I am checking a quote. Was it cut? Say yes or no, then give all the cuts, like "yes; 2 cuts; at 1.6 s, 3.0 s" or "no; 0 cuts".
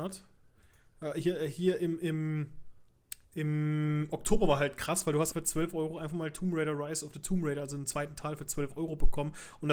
yes; 2 cuts; at 3.2 s, 5.3 s